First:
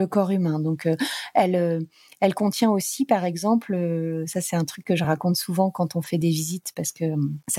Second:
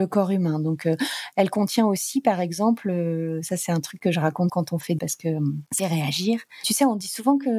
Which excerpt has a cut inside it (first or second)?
second